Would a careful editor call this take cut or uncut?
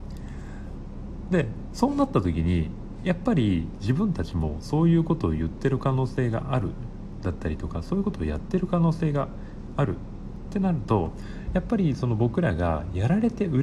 uncut